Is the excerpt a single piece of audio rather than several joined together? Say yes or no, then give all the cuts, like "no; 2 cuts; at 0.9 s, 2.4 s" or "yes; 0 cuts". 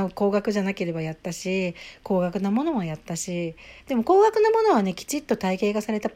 no; 1 cut; at 3.8 s